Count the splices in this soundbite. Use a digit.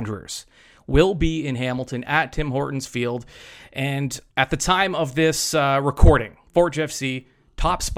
1